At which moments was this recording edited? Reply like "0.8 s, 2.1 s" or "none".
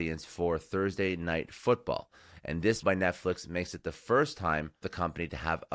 2.8 s, 4.8 s